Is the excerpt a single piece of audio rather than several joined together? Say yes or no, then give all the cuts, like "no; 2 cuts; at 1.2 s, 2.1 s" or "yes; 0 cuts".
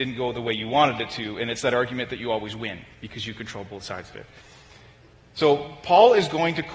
yes; 0 cuts